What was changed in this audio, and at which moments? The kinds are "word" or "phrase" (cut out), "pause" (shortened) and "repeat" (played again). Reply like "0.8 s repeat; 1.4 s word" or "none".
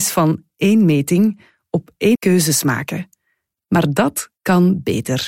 2.1 s word